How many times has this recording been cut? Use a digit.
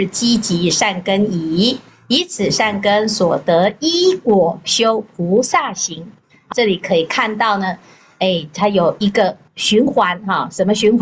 1